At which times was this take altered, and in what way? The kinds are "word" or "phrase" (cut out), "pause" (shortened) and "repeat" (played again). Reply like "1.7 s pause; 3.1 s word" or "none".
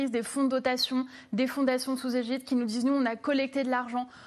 none